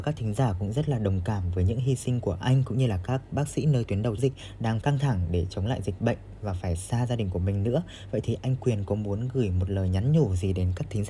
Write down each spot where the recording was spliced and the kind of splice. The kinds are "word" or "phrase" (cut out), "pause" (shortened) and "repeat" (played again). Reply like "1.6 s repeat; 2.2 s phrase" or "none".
4.2 s word; 4.8 s phrase